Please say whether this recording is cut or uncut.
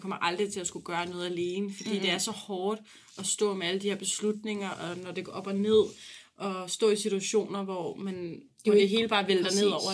uncut